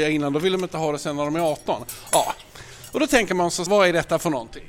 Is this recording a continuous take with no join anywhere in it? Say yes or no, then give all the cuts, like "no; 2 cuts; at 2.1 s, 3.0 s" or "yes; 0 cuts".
no; 1 cut; at 3.7 s